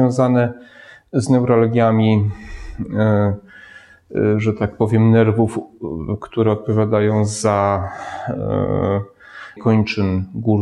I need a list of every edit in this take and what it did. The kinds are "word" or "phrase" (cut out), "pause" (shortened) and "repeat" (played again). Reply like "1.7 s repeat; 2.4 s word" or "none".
9.6 s word